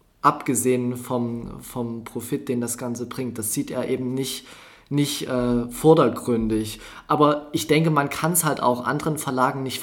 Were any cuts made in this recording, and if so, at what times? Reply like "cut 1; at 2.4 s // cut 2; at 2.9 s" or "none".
none